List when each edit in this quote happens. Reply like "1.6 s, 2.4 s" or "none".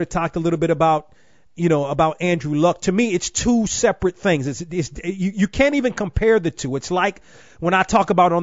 none